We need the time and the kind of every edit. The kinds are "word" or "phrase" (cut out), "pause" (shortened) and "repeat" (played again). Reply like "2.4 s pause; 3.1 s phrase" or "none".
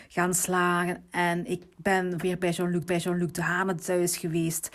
2.2 s word; 2.9 s repeat